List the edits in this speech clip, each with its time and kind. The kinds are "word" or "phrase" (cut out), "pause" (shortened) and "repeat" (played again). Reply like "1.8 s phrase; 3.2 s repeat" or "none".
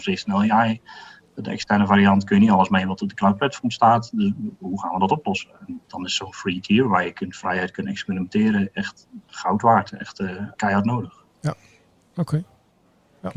5.8 s pause; 9.3 s word; 10.6 s word